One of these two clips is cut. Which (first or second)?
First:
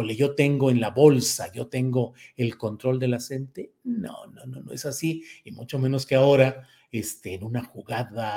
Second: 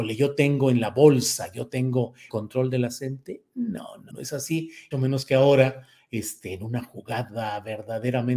second